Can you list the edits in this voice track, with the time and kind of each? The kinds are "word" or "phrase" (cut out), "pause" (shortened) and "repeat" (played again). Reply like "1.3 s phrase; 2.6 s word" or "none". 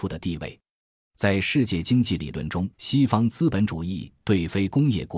2.7 s pause